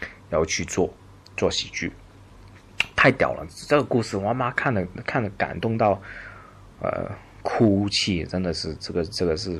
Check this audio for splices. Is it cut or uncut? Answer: uncut